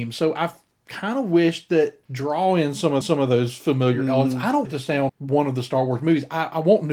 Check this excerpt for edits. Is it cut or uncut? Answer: cut